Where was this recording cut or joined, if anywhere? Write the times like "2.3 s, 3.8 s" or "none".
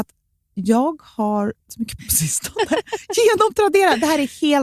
1.7 s, 2.0 s